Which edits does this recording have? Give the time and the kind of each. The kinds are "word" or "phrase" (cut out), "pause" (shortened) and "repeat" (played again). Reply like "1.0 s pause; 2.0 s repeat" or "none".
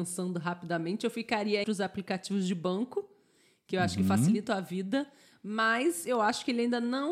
1.6 s word; 4.5 s word